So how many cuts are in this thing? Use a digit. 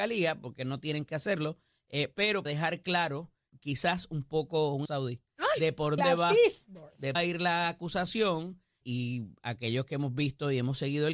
6